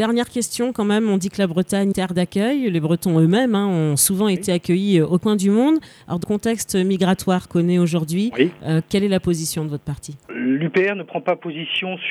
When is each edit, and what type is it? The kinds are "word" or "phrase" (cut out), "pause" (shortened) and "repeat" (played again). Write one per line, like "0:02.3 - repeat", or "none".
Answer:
0:01.9 - phrase
0:05.2 - word
0:06.2 - word
0:07.5 - word
0:10.3 - word